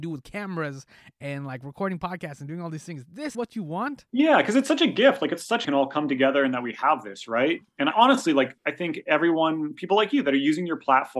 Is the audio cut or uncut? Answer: cut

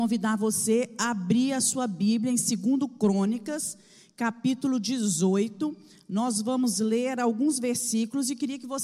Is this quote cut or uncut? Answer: uncut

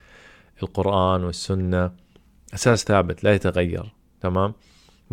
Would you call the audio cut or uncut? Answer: uncut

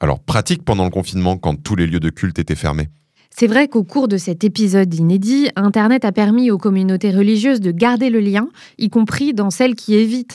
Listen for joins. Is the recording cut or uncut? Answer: uncut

